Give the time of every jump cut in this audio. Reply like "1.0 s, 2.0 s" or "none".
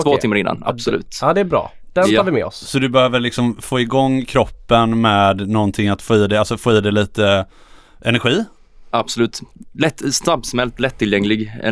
none